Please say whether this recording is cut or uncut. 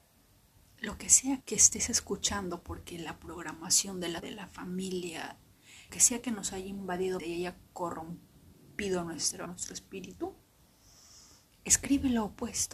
cut